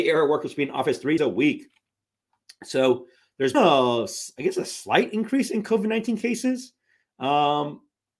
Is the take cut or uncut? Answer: cut